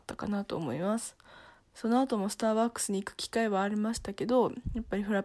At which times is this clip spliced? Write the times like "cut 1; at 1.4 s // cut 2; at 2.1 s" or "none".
none